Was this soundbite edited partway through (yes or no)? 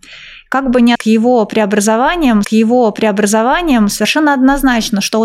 yes